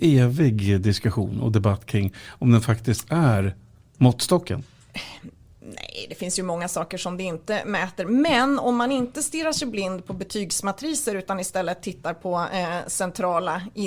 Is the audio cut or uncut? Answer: uncut